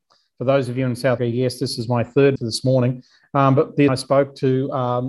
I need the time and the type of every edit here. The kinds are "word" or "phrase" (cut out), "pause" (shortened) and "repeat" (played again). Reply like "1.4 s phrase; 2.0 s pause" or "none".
1.2 s word; 2.4 s word; 3.9 s word

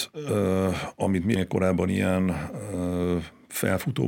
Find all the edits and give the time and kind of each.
1.4 s word

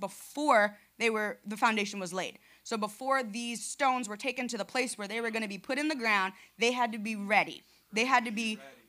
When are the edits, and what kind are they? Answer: none

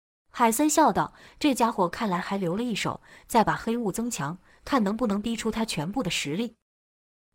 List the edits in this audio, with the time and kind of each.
none

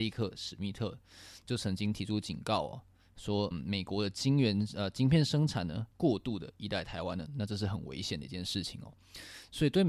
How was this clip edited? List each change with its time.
3.5 s word; 5.9 s pause

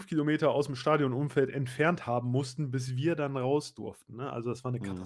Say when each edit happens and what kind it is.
none

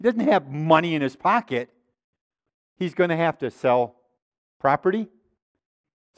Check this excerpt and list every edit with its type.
none

